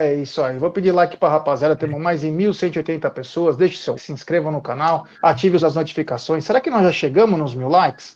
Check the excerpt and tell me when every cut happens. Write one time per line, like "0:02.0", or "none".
0:04.0
0:05.1
0:05.6